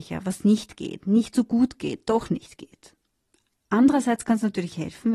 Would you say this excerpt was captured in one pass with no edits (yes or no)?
yes